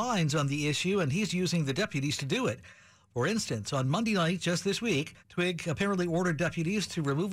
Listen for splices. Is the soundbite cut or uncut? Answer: cut